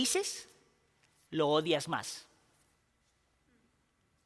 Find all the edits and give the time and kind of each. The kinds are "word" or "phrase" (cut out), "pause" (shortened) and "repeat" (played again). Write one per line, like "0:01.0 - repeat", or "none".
none